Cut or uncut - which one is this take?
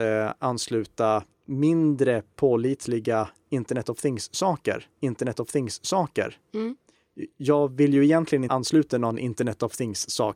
cut